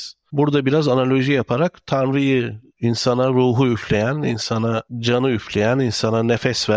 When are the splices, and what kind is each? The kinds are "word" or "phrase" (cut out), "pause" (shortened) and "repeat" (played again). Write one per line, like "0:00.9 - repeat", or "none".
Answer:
0:04.9 - pause